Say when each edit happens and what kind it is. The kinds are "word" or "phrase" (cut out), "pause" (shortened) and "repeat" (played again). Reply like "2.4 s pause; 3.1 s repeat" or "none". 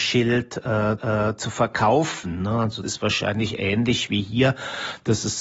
1.0 s repeat; 2.8 s word